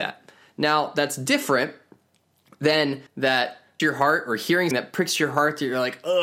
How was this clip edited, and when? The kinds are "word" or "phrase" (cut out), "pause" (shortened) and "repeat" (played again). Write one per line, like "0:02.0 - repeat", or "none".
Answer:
0:03.1 - phrase
0:03.8 - word
0:04.7 - word